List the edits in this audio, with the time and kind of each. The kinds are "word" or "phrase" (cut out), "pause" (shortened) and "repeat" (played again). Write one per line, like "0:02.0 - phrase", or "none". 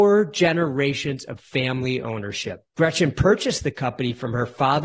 0:02.7 - pause